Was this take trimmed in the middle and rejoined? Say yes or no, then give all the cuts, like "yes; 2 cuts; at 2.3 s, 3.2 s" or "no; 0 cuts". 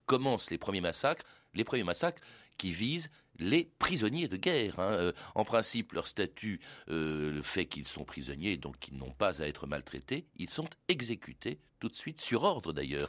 no; 0 cuts